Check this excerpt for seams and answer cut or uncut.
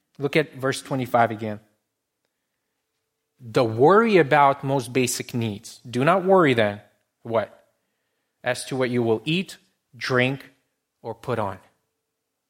uncut